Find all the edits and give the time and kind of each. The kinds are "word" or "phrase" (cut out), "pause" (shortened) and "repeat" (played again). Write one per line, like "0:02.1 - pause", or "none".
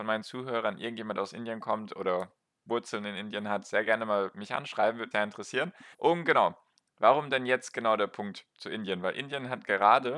0:05.1 - word
0:05.9 - pause